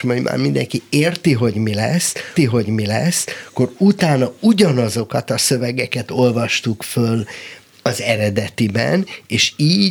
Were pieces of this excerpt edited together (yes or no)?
yes